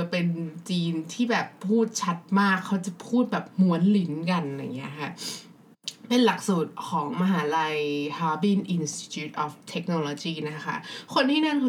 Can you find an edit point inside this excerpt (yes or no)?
yes